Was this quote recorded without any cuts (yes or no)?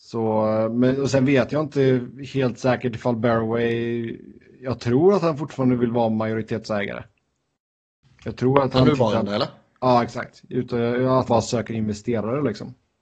no